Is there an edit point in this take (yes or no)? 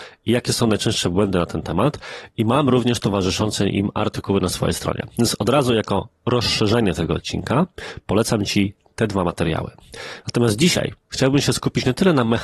no